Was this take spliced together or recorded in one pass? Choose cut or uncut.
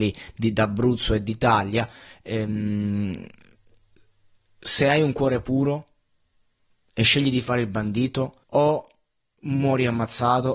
cut